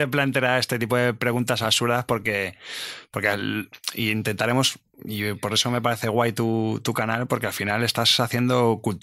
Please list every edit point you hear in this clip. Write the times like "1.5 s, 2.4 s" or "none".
none